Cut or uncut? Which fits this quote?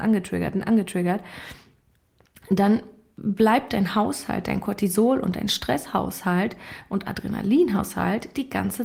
uncut